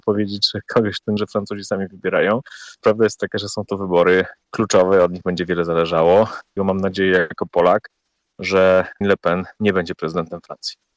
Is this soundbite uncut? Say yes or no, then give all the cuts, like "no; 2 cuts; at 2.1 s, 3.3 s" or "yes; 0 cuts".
no; 6 cuts; at 1.2 s, 2.8 s, 4.4 s, 6.6 s, 9.0 s, 9.6 s